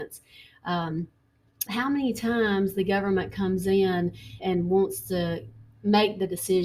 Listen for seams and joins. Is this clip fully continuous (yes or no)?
no